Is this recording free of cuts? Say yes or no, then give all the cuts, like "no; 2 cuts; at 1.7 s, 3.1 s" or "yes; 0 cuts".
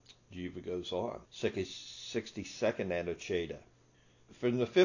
no; 1 cut; at 1.2 s